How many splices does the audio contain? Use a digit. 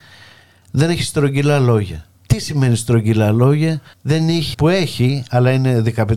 3